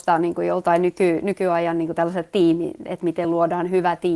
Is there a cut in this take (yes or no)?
no